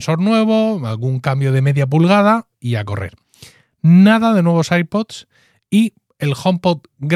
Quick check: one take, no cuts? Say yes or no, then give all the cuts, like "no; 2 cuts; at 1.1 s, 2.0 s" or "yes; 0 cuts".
yes; 0 cuts